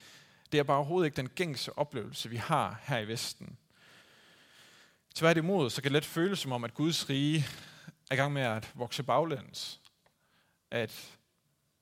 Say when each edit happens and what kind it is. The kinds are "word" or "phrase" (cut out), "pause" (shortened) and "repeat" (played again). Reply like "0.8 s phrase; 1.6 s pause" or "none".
none